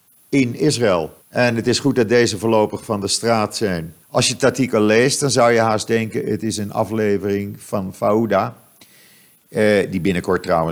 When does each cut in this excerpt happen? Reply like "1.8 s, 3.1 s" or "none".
1.2 s, 4.0 s